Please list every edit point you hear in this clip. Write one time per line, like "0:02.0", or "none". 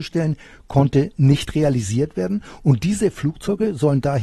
none